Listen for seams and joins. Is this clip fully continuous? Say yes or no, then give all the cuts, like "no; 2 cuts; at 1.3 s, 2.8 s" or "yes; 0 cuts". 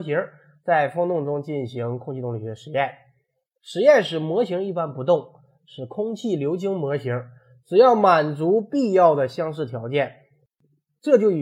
yes; 0 cuts